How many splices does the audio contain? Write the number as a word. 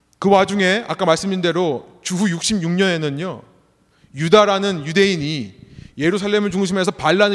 zero